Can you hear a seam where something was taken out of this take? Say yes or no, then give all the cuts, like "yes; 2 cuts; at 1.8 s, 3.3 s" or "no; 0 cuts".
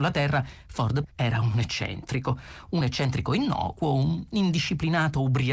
no; 0 cuts